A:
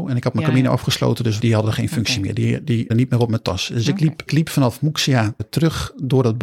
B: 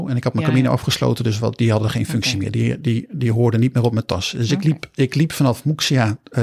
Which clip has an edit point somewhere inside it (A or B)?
A